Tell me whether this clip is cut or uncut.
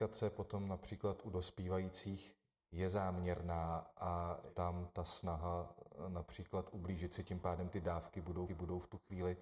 cut